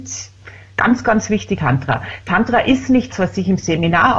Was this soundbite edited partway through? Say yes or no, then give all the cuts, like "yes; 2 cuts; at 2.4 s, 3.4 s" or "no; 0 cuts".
yes; 2 cuts; at 1.6 s, 3.1 s